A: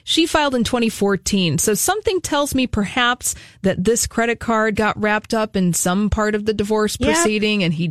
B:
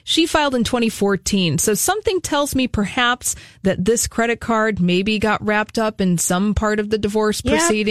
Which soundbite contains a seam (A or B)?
A